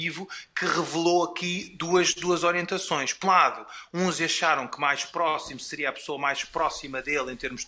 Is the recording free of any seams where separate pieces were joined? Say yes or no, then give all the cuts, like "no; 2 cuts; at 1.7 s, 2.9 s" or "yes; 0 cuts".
no; 1 cut; at 3.2 s